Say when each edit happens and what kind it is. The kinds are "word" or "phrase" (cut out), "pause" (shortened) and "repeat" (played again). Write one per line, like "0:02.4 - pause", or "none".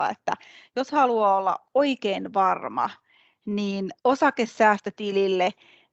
none